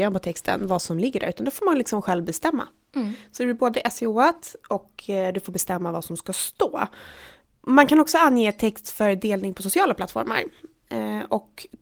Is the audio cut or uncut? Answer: uncut